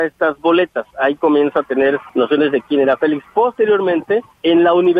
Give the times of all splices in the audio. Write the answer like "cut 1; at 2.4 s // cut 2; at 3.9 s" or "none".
none